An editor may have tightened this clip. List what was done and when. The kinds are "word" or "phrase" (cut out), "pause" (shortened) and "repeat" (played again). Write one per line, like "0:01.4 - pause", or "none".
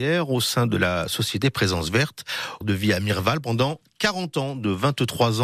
0:02.6 - word